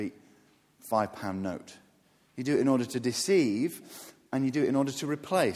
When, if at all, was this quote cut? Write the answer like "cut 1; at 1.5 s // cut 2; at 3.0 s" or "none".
none